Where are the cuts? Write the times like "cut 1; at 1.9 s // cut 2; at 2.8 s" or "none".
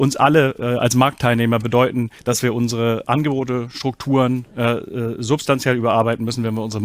cut 1; at 2.2 s